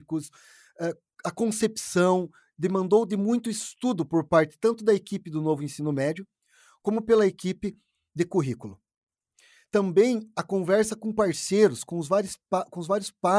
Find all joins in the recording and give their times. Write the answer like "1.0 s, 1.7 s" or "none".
none